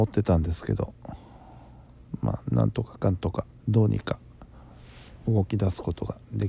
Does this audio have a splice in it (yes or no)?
yes